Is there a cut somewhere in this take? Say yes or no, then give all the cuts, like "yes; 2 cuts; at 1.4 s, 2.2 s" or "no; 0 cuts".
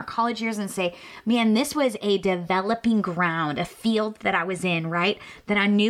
no; 0 cuts